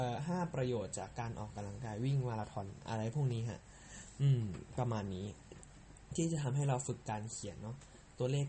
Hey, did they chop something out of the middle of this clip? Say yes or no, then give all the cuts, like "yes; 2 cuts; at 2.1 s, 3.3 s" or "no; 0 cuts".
no; 0 cuts